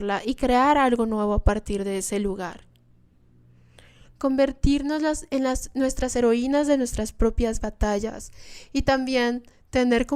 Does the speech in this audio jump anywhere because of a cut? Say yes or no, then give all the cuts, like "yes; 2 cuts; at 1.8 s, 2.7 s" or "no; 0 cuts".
no; 0 cuts